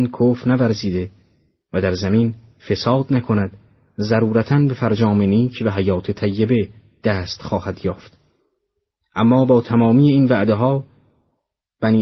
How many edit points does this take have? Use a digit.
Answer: 0